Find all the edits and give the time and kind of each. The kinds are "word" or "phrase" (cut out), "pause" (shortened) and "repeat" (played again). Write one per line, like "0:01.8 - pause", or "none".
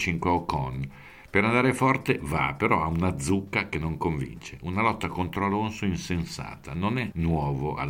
none